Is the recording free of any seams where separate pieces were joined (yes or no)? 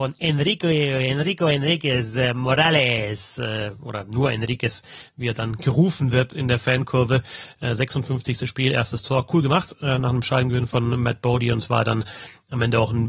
yes